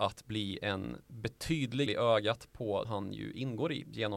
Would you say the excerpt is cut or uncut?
cut